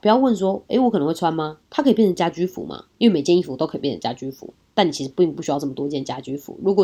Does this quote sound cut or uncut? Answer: cut